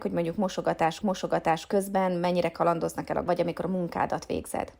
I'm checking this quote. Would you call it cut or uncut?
cut